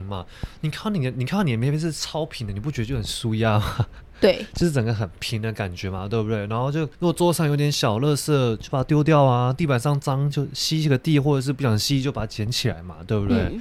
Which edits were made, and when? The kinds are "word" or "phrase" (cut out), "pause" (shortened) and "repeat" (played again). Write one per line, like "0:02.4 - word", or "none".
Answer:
0:06.9 - pause

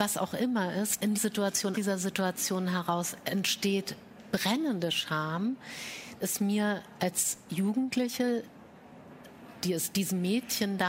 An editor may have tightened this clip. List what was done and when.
0:01.1 - word
0:01.7 - word
0:04.3 - word
0:06.2 - word

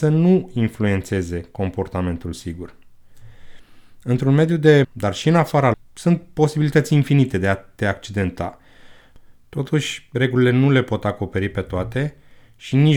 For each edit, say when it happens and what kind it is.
0:04.8 - word
0:05.7 - word

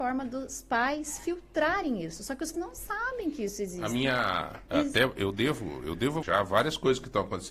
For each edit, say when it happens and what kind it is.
0:02.5 - word
0:06.2 - word

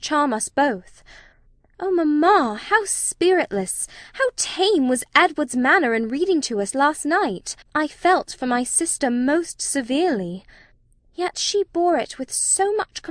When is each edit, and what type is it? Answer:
0:07.6 - pause

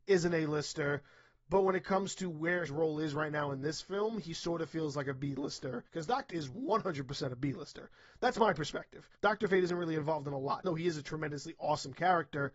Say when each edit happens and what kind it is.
0:02.7 - word
0:05.9 - pause
0:06.3 - word
0:09.1 - pause
0:10.6 - word

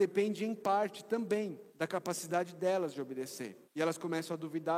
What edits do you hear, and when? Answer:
0:01.7 - pause
0:03.6 - pause

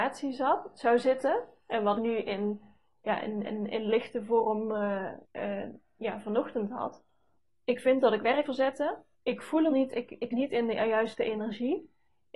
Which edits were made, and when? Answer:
0:02.0 - phrase
0:03.4 - repeat
0:05.2 - pause
0:07.4 - pause
0:08.4 - word
0:09.1 - pause
0:09.7 - word
0:10.3 - word

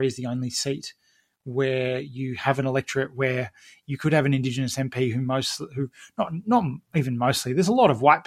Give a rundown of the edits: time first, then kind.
none

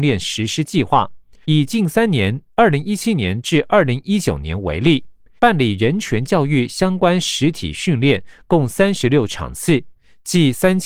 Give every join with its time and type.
0:01.4 - pause
0:05.4 - pause

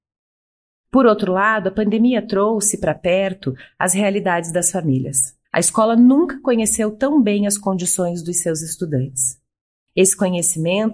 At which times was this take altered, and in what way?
0:05.4 - pause

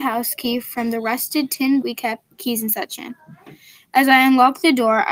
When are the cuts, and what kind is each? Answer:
0:01.8 - word

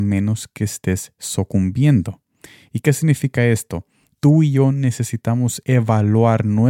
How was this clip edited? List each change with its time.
none

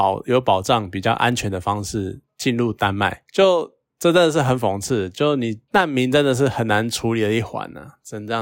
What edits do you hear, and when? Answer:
none

